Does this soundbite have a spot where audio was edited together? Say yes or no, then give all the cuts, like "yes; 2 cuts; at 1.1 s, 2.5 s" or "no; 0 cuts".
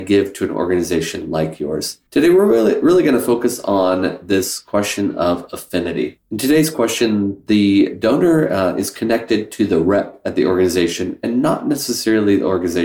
yes; 2 cuts; at 2.1 s, 6.2 s